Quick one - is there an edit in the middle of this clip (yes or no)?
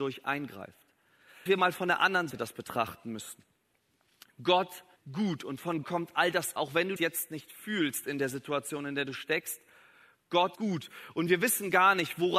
yes